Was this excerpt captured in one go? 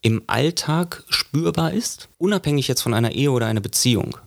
no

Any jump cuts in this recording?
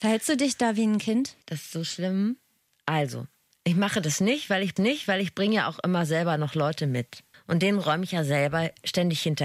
yes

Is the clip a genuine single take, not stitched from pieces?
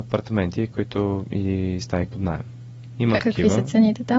no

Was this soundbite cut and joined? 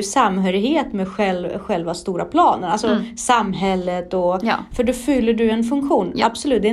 no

